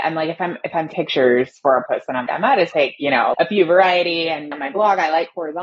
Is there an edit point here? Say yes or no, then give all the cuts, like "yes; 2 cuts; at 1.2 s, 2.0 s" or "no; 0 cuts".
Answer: yes; 6 cuts; at 0.9 s, 1.9 s, 2.3 s, 2.7 s, 3.3 s, 4.5 s